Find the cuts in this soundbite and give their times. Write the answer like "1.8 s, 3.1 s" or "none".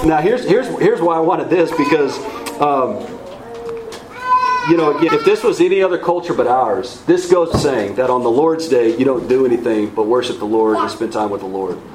5.1 s, 7.5 s